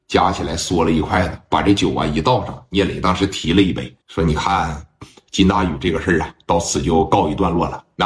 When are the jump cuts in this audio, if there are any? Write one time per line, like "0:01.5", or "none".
0:04.0